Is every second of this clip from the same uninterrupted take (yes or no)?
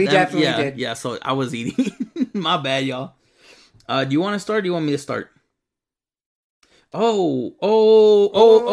yes